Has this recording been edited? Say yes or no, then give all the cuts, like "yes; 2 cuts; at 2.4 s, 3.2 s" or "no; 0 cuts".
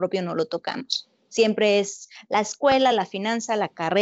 no; 0 cuts